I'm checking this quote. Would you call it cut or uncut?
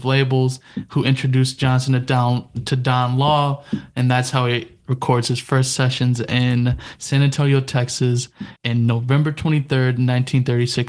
cut